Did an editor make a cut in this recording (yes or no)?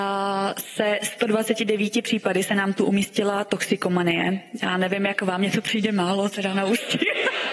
no